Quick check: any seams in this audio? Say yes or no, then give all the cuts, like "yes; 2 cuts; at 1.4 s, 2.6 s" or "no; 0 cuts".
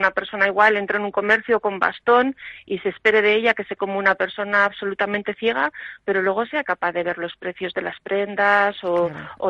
yes; 1 cut; at 3.8 s